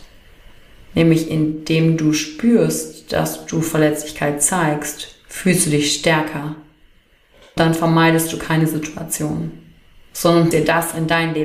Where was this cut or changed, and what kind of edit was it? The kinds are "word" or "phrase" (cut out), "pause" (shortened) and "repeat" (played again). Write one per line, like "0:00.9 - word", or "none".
0:07.6 - word
0:10.5 - word